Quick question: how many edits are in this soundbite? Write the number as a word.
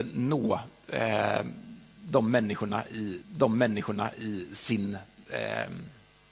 one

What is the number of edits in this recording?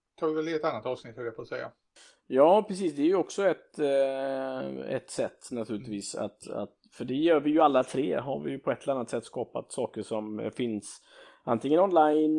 zero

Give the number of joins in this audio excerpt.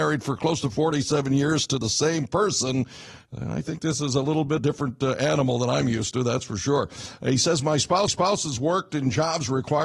two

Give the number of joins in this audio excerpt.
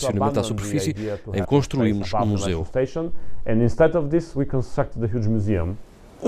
one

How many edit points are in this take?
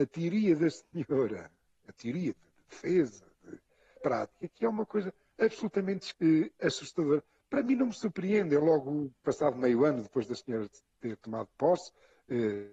three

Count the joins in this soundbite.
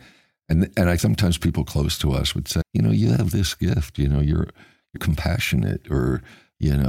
three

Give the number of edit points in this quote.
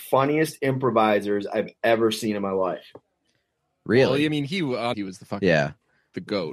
one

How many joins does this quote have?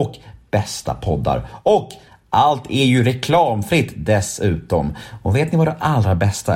zero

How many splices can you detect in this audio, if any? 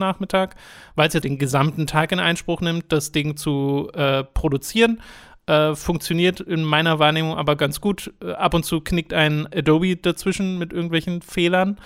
one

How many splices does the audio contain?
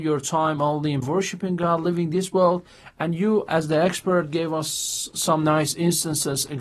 two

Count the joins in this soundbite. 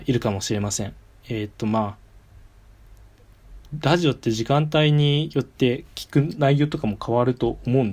zero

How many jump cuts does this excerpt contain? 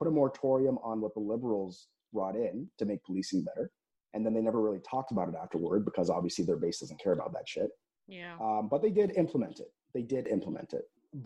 zero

